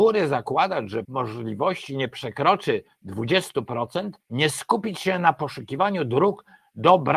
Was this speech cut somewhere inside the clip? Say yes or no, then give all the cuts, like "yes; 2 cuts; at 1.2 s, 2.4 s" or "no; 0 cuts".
yes; 2 cuts; at 1.0 s, 4.2 s